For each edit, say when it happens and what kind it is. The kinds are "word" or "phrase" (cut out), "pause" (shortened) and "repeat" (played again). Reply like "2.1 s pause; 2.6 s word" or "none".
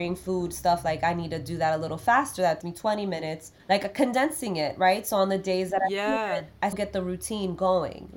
2.6 s word; 3.6 s pause; 6.7 s word

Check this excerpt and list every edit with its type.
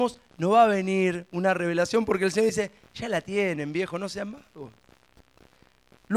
none

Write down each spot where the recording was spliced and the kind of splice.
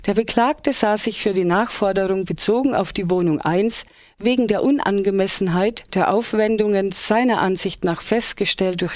none

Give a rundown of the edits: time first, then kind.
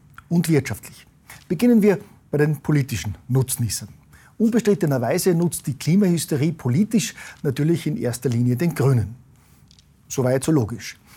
none

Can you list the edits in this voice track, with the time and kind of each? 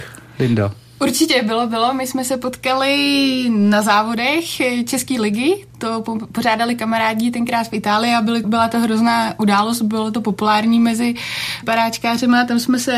8.4 s word; 11.6 s word

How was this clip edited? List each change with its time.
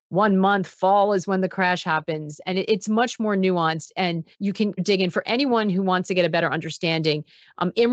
4.3 s pause; 4.8 s word

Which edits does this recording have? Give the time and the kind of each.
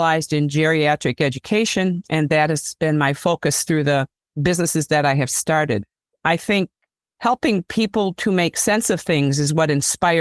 none

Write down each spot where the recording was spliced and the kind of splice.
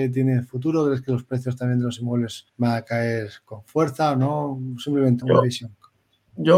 2.5 s pause; 5.2 s word

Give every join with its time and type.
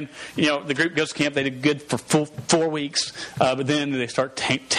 none

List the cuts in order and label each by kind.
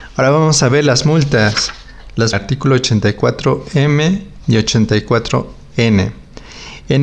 2.3 s phrase

